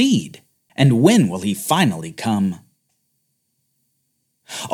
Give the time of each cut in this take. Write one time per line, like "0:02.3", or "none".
none